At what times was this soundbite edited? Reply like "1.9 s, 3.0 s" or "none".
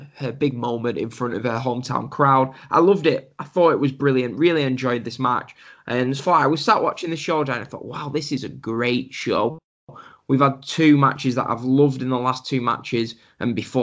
6.2 s